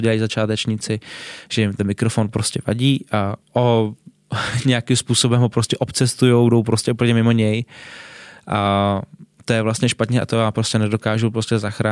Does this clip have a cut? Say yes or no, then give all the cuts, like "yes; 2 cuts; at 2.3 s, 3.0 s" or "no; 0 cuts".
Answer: yes; 1 cut; at 3.4 s